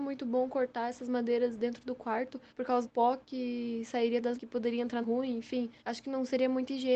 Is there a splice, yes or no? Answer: yes